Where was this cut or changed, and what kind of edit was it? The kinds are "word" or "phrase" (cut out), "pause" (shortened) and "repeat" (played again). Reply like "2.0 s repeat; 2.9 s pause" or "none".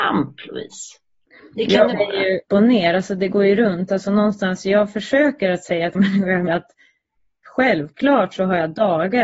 1.9 s word; 2.5 s word; 5.9 s word; 6.5 s word

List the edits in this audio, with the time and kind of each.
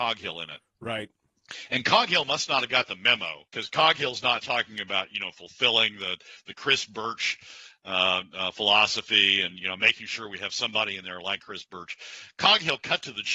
3.5 s pause

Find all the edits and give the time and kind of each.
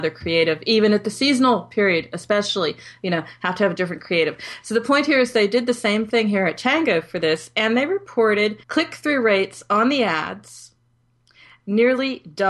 8.6 s pause

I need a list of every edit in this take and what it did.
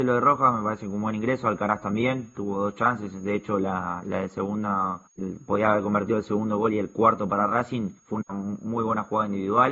5.1 s pause; 8.0 s pause

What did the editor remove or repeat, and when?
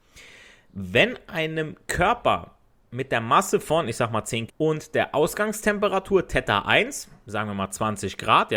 4.5 s word

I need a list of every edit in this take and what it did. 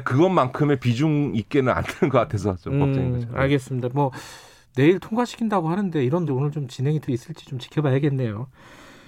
6.3 s word; 7.1 s word

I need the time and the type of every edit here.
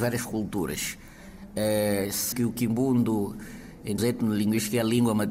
2.3 s word; 4.0 s word

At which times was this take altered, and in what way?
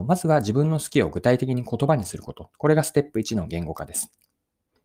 none

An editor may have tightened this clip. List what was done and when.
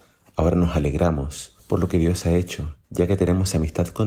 1.6 s pause; 2.8 s pause

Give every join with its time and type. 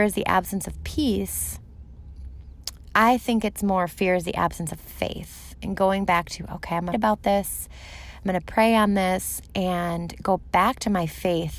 6.9 s word

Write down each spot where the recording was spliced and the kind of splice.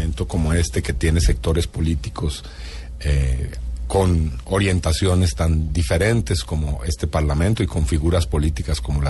none

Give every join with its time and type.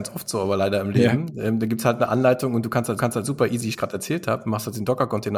3.0 s repeat; 3.7 s phrase

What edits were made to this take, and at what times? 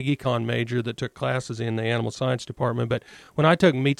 none

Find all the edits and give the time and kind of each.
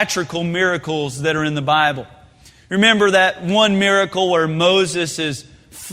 none

